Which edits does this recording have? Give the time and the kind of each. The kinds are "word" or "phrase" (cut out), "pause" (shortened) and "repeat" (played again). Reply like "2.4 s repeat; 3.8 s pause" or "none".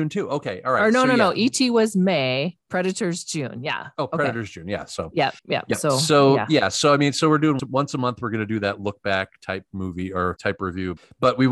2.6 s pause; 5.4 s pause; 7.6 s word; 10.4 s word